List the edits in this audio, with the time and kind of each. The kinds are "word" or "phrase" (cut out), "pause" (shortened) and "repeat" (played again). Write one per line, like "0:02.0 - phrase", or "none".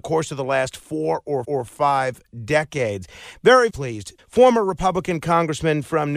0:01.4 - repeat
0:03.7 - word
0:04.2 - phrase